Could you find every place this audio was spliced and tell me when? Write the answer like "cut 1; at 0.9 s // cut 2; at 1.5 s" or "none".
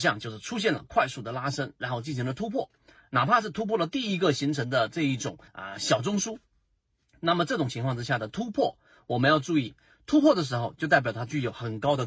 cut 1; at 5.5 s